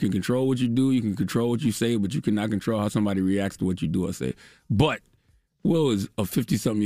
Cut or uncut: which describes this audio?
uncut